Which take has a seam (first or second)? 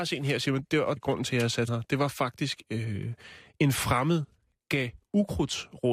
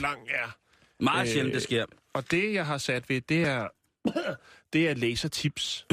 first